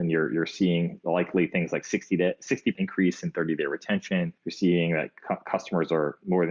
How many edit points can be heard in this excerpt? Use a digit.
2